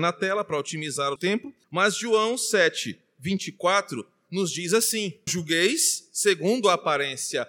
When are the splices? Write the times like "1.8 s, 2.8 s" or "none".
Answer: 1.2 s, 1.6 s, 5.3 s